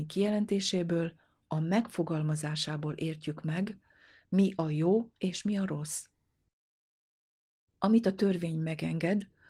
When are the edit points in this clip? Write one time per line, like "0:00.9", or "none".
none